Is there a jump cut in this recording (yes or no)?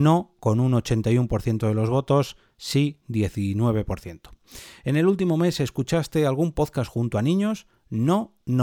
no